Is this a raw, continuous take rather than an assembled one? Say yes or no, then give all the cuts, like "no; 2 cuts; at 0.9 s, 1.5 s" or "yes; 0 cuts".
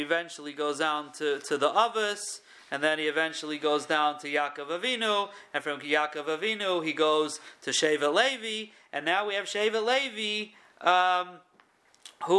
yes; 0 cuts